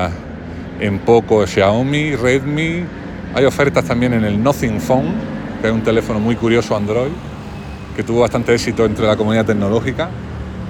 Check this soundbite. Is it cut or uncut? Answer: uncut